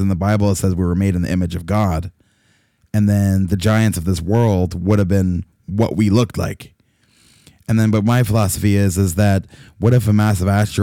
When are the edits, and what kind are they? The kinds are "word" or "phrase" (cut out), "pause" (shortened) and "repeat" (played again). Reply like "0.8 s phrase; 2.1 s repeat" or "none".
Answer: none